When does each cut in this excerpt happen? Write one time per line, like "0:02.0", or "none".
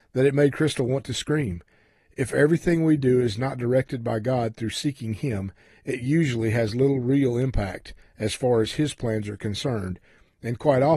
none